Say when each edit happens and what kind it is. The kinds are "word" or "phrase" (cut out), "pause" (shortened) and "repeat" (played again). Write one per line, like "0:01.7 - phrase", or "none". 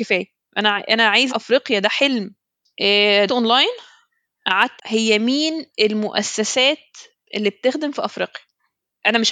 0:01.3 - word
0:03.3 - word
0:04.8 - word
0:07.2 - word

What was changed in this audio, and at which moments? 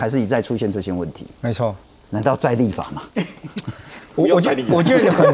0:01.8 - pause

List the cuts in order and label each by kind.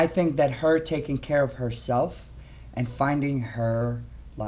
none

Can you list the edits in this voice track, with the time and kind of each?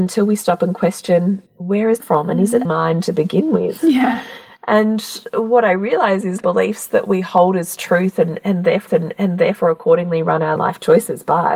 0:01.5 - pause
0:02.0 - phrase
0:02.6 - word
0:06.4 - phrase
0:08.9 - repeat
0:10.6 - phrase

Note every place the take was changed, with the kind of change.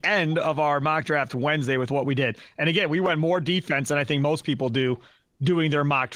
none

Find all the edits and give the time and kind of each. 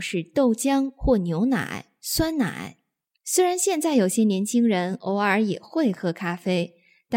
none

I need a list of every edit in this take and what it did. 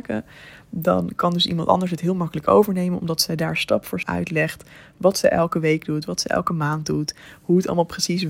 0:04.0 - word

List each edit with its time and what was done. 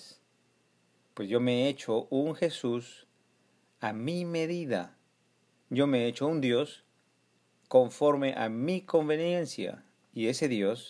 none

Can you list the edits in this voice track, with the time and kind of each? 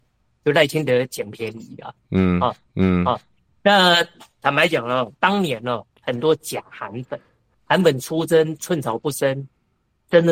0:02.7 - repeat
0:05.2 - pause
0:05.9 - pause
0:07.5 - word

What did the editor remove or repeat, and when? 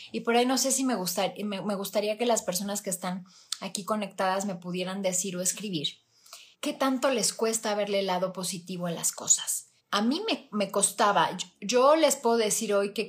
0:06.5 - pause
0:09.8 - pause

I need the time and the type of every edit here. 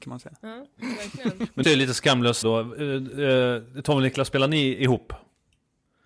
0:01.6 - word
0:02.4 - word

